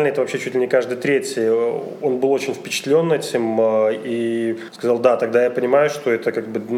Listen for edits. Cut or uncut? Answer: uncut